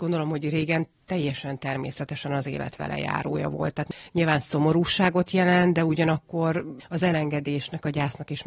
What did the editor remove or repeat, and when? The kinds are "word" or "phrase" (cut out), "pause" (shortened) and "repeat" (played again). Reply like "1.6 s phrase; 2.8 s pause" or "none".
none

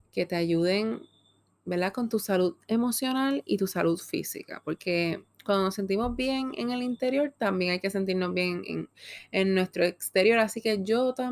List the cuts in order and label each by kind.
none

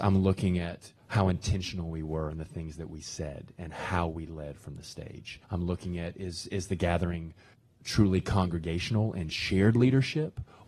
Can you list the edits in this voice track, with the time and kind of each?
1.0 s pause; 5.4 s pause; 7.5 s pause

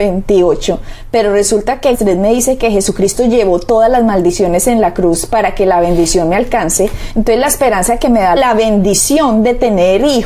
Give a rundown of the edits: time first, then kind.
1.9 s word; 8.4 s phrase

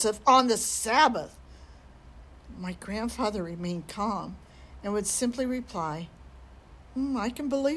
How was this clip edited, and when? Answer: none

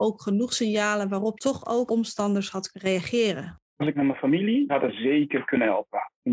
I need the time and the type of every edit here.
1.4 s word; 1.9 s word; 2.7 s word; 3.9 s word; 4.7 s word

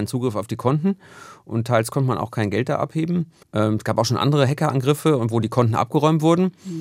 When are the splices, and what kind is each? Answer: 3.4 s pause

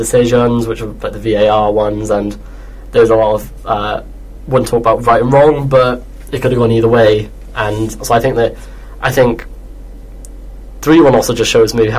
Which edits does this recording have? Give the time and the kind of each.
none

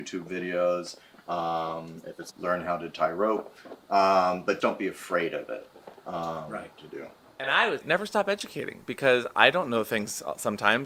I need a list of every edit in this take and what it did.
2.3 s word; 4.6 s word; 7.8 s word

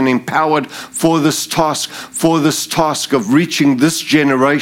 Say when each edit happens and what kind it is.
1.9 s repeat

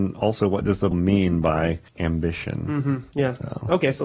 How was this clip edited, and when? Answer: 0.9 s word; 1.9 s pause

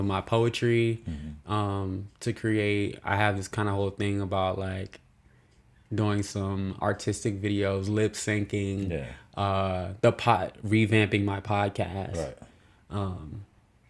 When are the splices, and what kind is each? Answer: 6.8 s word

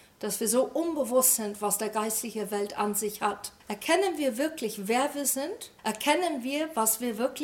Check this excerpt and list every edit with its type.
3.6 s pause; 5.8 s pause

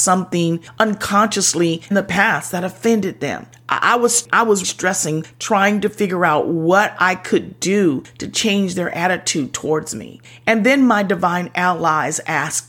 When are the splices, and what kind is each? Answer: 1.9 s word; 4.6 s word

